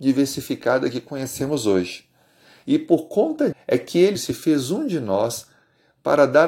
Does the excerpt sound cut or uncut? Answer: cut